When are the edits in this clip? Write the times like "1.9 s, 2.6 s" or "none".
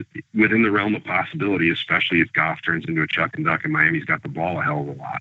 none